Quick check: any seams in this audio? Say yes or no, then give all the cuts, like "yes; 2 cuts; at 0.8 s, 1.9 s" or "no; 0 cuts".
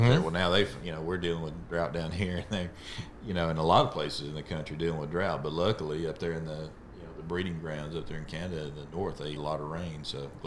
yes; 1 cut; at 9.4 s